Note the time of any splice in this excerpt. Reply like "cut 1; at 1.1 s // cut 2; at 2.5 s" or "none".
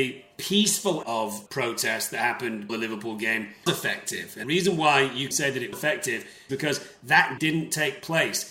cut 1; at 1.0 s // cut 2; at 1.5 s // cut 3; at 2.7 s // cut 4; at 3.7 s // cut 5; at 4.4 s // cut 6; at 5.3 s // cut 7; at 5.7 s // cut 8; at 6.5 s // cut 9; at 7.4 s